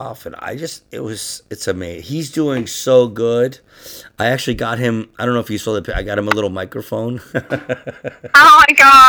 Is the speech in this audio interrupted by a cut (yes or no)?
no